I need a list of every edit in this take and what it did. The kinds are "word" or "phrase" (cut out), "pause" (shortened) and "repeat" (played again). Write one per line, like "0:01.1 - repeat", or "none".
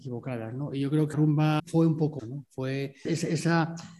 0:01.1 - word
0:01.6 - word
0:02.2 - word
0:03.0 - word